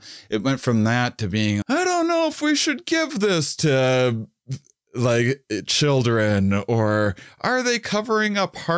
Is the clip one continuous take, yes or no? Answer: no